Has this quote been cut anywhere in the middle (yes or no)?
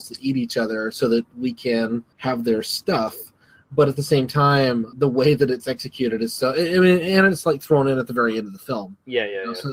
yes